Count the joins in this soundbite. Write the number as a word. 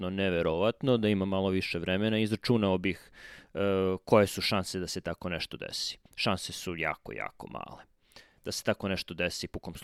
one